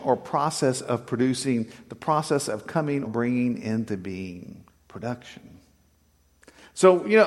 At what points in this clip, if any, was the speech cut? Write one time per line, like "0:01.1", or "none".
0:03.1
0:04.7